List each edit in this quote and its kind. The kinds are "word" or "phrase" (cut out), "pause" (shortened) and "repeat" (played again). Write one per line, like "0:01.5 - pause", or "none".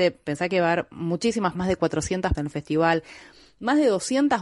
0:01.5 - word
0:02.3 - word